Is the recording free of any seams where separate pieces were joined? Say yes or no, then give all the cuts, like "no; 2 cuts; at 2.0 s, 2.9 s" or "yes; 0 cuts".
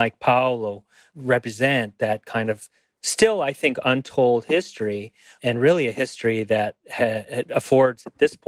yes; 0 cuts